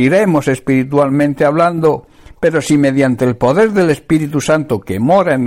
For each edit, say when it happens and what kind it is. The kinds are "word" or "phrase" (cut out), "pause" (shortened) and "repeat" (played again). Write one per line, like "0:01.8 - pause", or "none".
none